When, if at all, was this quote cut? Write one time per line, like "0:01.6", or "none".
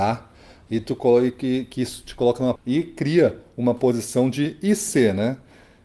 0:02.6